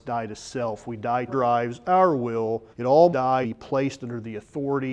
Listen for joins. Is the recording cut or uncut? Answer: cut